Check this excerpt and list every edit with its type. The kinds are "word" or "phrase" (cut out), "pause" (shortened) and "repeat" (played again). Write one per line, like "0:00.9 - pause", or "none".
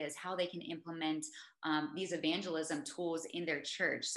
none